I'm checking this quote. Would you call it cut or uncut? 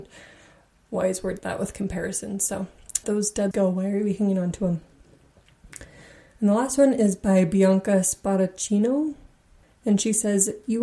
cut